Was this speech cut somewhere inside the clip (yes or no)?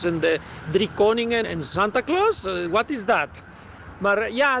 yes